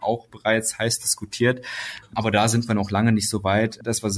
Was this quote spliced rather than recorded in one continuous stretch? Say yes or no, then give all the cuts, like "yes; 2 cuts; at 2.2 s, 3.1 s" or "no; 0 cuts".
no; 0 cuts